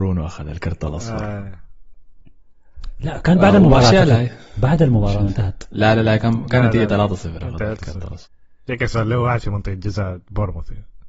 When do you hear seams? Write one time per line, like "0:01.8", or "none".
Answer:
0:08.3